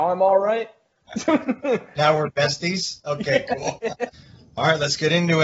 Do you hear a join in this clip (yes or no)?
no